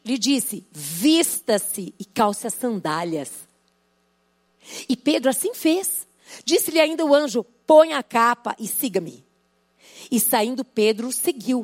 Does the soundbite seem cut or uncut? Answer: uncut